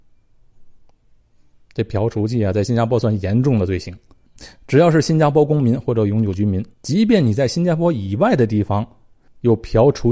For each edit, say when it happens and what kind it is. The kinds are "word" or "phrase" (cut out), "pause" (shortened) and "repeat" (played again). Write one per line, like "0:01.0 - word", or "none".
0:06.7 - pause